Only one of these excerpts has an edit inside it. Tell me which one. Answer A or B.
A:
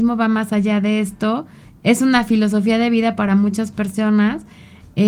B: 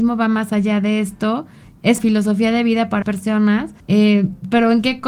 B